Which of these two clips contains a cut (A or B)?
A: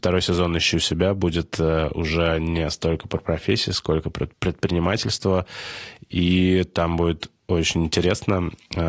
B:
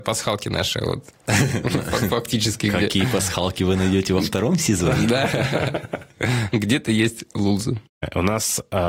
A